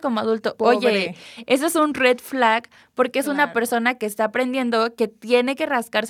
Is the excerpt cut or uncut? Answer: uncut